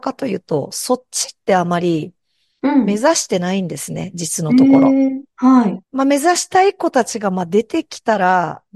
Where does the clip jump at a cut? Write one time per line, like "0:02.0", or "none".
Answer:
0:05.8